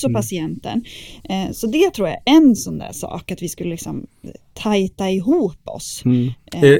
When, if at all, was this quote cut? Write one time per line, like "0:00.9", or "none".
none